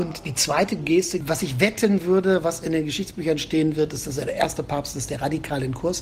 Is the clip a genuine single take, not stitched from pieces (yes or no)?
yes